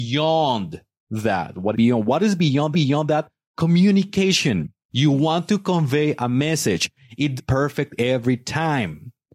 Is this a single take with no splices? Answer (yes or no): no